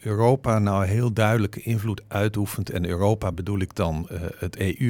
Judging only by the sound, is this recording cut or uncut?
uncut